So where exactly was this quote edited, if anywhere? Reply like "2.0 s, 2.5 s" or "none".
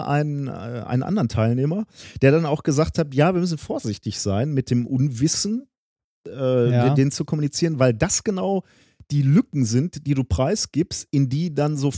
none